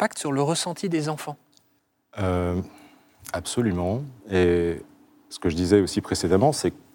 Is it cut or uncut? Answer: cut